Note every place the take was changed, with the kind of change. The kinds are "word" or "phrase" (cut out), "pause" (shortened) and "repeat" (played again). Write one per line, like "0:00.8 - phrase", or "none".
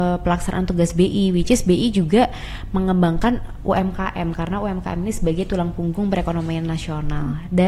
none